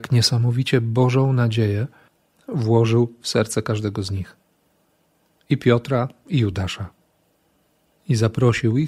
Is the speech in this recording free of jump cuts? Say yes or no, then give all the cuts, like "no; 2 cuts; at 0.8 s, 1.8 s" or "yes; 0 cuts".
yes; 0 cuts